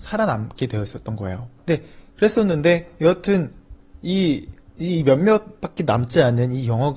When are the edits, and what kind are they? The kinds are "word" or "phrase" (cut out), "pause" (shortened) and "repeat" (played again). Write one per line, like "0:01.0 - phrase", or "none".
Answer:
0:01.6 - pause